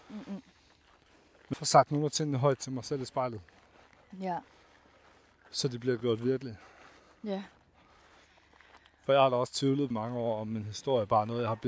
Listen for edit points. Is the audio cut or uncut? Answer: cut